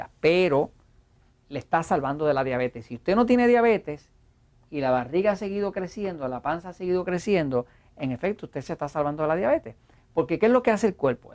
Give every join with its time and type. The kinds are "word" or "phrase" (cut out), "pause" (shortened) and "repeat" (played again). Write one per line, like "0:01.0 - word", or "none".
none